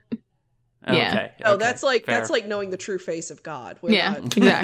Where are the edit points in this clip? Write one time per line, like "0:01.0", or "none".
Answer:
none